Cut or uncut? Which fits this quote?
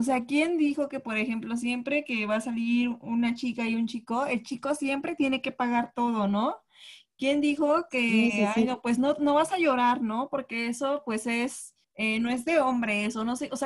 cut